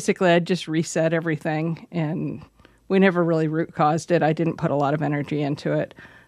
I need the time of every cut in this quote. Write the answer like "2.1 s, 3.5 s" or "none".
none